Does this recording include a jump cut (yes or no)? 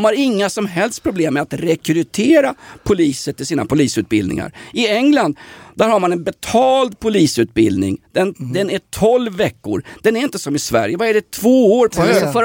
no